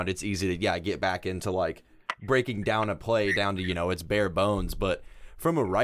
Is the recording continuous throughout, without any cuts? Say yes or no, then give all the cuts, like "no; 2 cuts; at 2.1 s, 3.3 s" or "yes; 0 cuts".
yes; 0 cuts